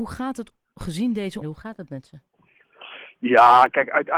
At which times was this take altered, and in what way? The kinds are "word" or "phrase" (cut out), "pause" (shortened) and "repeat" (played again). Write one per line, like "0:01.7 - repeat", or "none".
0:01.4 - word